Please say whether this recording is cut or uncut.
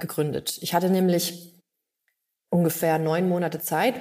uncut